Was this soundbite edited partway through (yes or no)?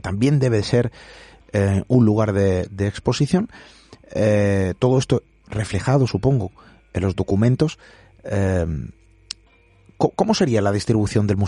no